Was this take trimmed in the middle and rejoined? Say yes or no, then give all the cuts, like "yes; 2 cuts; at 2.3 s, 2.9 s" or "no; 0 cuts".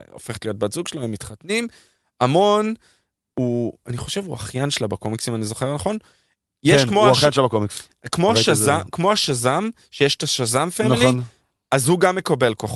no; 0 cuts